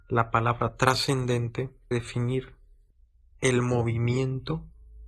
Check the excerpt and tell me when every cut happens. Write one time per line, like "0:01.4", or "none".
0:01.9

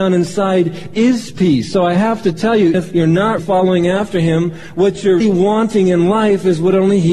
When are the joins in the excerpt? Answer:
0:02.7
0:03.4
0:05.2

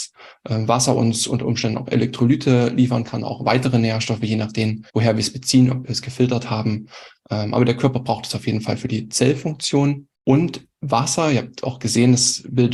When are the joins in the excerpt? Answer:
0:04.9
0:10.1

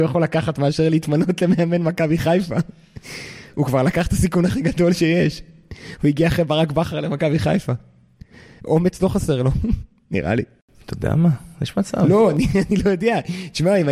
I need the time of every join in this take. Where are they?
none

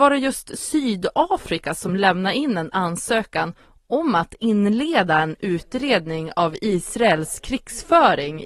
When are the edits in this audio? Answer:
none

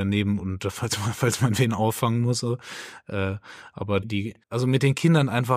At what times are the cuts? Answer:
0:04.0
0:04.4

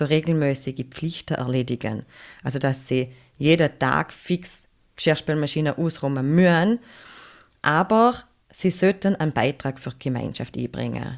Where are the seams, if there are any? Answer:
none

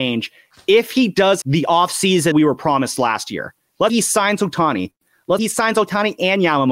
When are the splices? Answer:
0:01.4
0:02.3
0:03.9
0:05.4

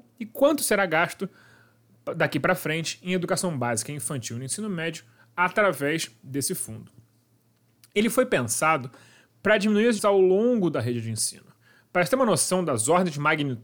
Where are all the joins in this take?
0:10.0

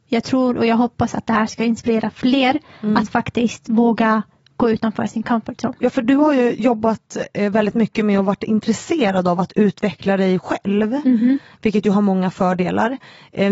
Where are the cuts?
none

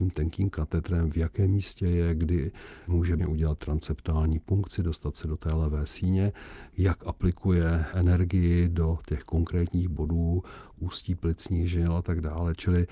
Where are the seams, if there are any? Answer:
0:03.2
0:10.7

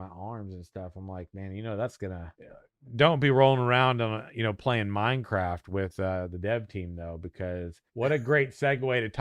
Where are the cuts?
0:02.3
0:07.9

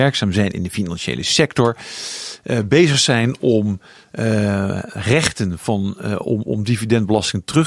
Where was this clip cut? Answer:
none

